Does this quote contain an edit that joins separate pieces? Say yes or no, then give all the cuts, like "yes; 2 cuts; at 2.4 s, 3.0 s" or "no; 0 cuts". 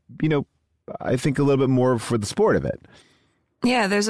no; 0 cuts